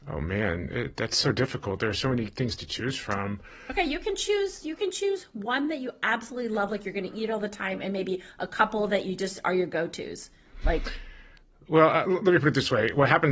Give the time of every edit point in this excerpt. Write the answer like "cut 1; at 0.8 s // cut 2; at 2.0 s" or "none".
none